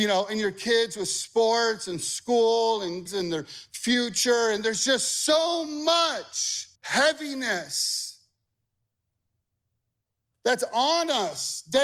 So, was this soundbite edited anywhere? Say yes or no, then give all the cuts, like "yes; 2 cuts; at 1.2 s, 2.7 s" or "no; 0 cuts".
yes; 2 cuts; at 3.1 s, 6.8 s